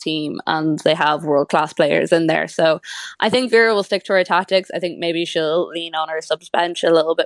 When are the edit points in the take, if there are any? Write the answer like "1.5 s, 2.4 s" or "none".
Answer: none